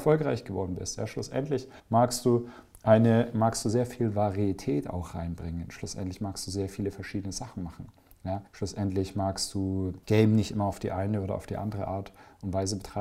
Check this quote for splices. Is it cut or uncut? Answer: cut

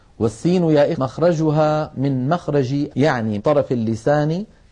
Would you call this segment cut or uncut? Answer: cut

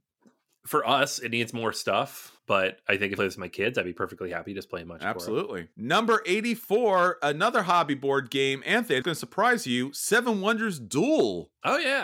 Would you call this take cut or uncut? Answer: cut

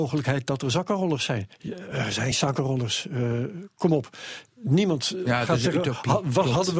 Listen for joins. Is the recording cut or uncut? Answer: uncut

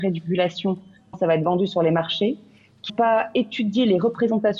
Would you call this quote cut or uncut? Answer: cut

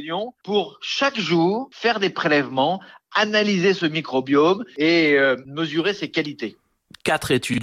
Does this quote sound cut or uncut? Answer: uncut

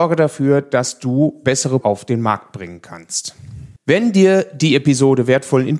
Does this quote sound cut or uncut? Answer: cut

